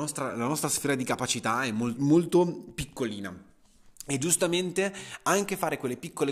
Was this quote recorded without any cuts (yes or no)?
no